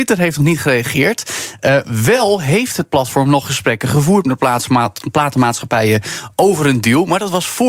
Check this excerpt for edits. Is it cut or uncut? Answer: uncut